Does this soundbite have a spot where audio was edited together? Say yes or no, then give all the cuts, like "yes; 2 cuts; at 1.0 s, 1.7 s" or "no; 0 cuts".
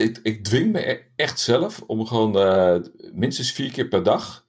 no; 0 cuts